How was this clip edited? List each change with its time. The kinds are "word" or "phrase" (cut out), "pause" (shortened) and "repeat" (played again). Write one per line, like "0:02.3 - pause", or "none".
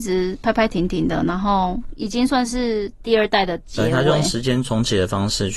none